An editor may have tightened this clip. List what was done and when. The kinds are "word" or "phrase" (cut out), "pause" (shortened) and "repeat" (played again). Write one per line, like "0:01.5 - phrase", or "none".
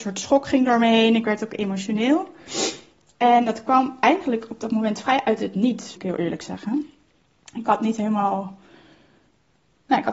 0:06.0 - word